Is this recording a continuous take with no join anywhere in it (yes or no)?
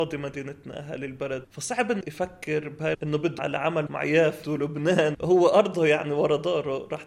no